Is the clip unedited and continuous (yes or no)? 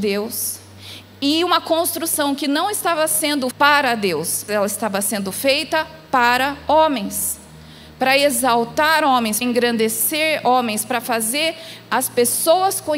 no